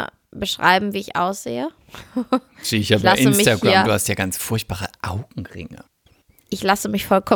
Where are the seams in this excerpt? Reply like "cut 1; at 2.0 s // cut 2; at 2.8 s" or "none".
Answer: none